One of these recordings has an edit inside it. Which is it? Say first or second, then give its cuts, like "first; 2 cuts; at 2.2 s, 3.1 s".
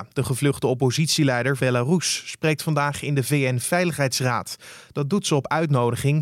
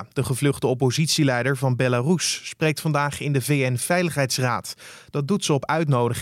first; 1 cut; at 1.6 s